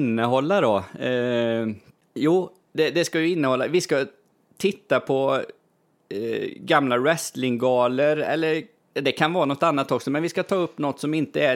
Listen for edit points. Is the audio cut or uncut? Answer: uncut